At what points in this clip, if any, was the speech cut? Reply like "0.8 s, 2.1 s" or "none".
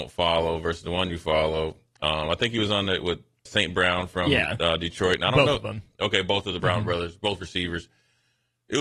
3.5 s, 6.6 s